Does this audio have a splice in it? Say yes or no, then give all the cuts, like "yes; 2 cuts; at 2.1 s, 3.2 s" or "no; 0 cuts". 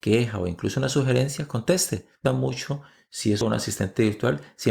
yes; 2 cuts; at 2.2 s, 3.4 s